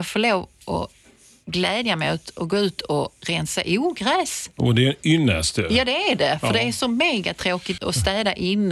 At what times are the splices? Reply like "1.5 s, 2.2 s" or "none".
7.8 s